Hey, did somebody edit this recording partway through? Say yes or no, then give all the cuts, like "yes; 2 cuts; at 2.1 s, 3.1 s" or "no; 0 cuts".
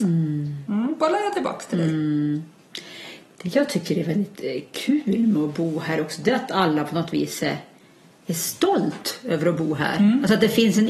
no; 0 cuts